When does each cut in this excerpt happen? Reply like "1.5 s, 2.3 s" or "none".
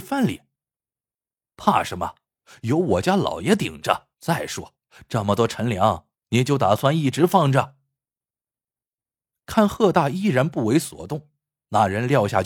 4.1 s